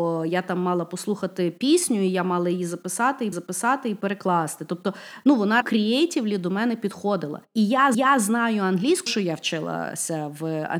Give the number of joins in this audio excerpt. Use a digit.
5